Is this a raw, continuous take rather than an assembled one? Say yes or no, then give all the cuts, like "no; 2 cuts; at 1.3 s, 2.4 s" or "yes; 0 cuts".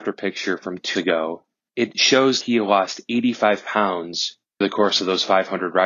no; 4 cuts; at 0.9 s, 1.7 s, 2.4 s, 4.6 s